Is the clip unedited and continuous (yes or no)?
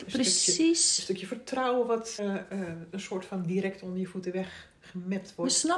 no